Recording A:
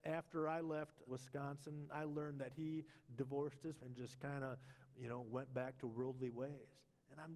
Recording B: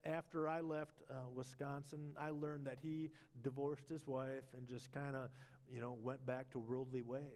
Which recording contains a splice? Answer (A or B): A